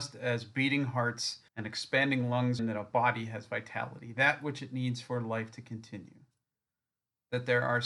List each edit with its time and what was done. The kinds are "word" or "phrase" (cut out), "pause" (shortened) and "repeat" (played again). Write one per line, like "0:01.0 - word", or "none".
0:01.5 - pause
0:02.6 - phrase